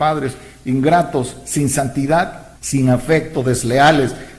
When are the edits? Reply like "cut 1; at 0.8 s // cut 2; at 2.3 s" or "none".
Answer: cut 1; at 2.6 s

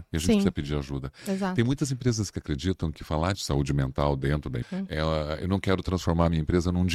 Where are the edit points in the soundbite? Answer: cut 1; at 3.3 s // cut 2; at 4.6 s

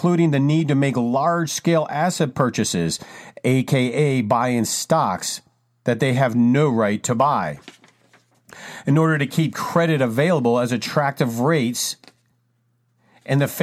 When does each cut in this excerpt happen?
none

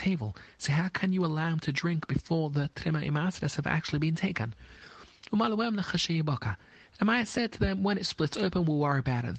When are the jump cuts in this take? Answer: none

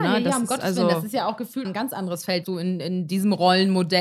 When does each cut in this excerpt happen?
cut 1; at 1.6 s // cut 2; at 2.4 s

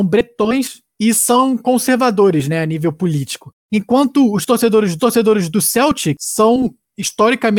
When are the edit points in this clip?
cut 1; at 3.6 s // cut 2; at 5.0 s

